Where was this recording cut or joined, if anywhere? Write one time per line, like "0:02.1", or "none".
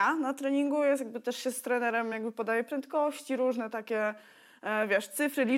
none